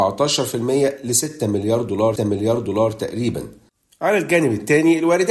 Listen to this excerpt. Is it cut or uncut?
cut